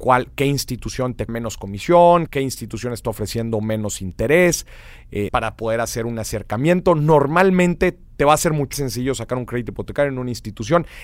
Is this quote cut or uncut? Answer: cut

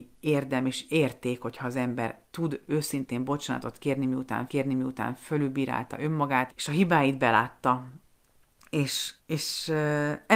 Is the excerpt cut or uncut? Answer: cut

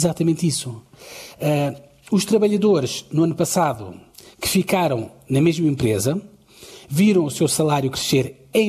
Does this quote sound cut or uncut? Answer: uncut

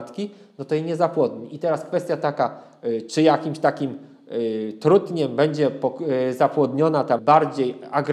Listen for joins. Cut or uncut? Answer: cut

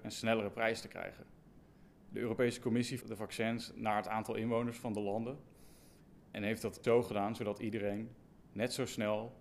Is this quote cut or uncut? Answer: cut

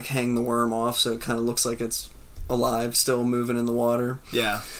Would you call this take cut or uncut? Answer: uncut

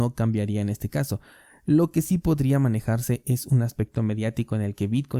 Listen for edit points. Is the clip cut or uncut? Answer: uncut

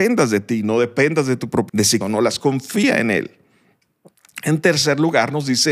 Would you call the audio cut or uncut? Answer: cut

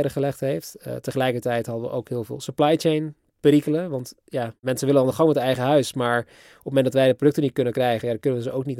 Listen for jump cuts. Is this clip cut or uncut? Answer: uncut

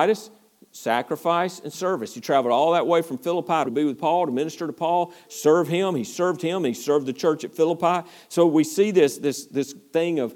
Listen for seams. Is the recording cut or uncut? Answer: cut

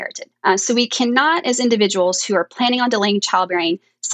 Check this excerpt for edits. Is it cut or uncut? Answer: uncut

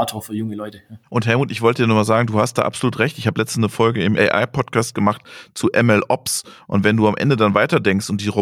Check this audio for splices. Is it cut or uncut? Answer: cut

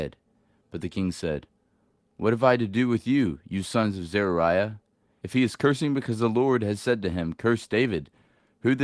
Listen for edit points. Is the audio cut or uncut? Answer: uncut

